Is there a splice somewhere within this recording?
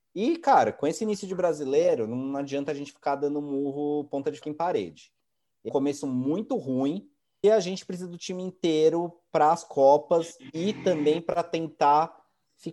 yes; 3 cuts; at 4.4 s, 5.7 s, 7.4 s

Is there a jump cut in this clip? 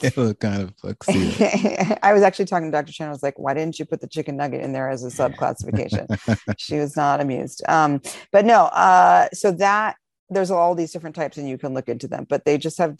no; 0 cuts

